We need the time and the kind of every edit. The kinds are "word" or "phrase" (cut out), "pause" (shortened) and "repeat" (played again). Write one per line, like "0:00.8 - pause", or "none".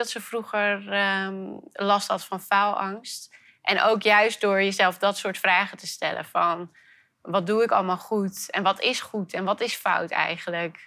none